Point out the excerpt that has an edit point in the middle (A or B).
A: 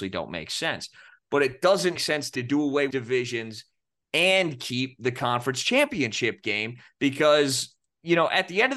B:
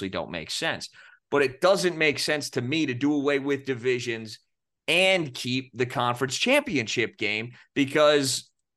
A